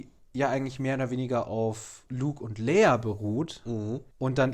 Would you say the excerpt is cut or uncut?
cut